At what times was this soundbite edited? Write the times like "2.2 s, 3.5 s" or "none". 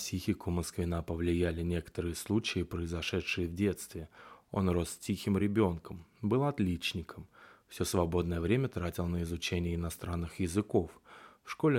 none